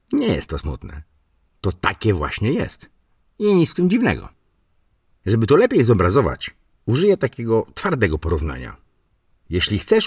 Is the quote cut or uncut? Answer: uncut